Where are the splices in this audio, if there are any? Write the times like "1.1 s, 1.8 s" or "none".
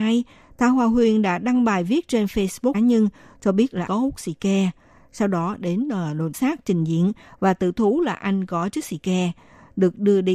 2.7 s, 3.9 s, 6.3 s